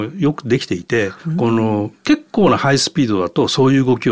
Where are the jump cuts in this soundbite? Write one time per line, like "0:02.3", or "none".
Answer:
0:01.2